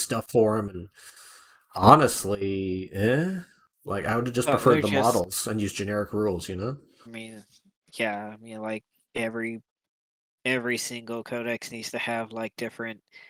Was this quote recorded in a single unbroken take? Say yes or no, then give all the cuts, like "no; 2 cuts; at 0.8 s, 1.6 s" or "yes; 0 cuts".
no; 1 cut; at 7.1 s